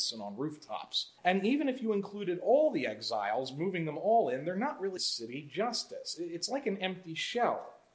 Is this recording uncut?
no; 2 cuts; at 1.2 s, 5.0 s

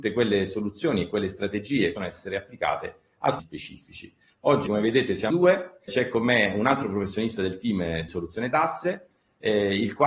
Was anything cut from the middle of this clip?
yes; 6 cuts; at 2.0 s, 3.4 s, 4.7 s, 5.3 s, 5.9 s, 8.1 s

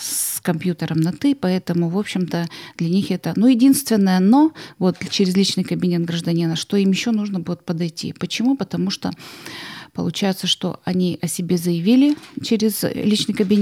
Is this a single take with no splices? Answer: yes; 0 cuts

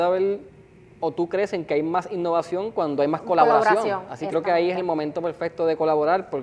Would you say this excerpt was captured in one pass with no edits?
no; 1 cut; at 4.3 s

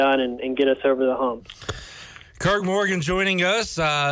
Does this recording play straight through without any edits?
yes; 0 cuts

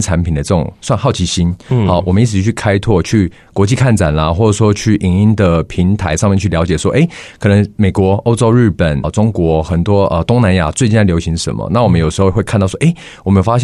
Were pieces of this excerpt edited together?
yes; 1 cut; at 9.0 s

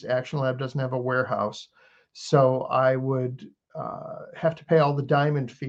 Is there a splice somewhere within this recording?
no; 0 cuts

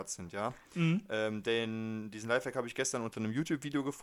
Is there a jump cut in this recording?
no; 0 cuts

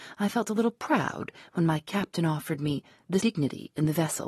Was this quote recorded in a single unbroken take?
no; 1 cut; at 3.2 s

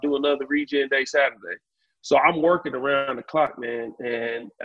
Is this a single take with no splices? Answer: yes; 0 cuts

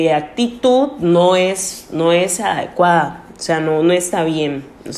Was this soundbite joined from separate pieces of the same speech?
no; 0 cuts

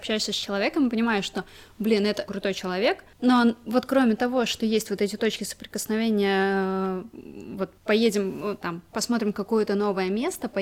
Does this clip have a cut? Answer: yes; 2 cuts; at 2.3 s, 7.8 s

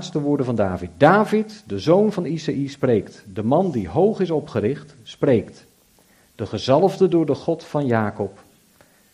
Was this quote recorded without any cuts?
yes; 0 cuts

